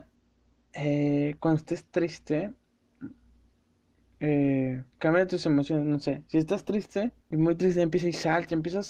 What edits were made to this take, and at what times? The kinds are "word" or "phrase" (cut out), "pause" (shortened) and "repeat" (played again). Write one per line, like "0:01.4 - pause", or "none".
0:04.9 - pause
0:07.2 - pause